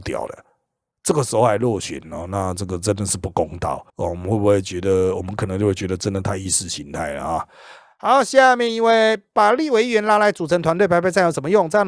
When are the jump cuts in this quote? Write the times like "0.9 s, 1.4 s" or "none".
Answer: 3.9 s